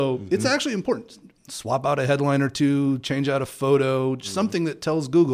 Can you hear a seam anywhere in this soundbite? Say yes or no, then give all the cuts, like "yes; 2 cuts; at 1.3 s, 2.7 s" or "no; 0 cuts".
no; 0 cuts